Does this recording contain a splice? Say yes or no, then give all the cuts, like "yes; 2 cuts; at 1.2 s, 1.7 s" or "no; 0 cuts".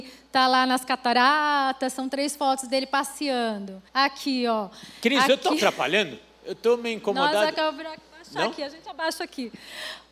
yes; 1 cut; at 3.9 s